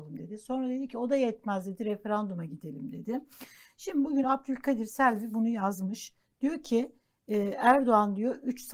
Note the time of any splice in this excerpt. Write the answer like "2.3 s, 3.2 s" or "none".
none

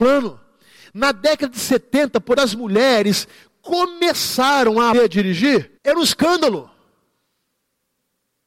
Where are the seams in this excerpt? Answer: 2.3 s, 4.9 s, 5.8 s

